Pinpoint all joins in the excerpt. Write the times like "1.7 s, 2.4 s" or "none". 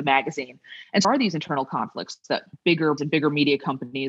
1.0 s, 3.0 s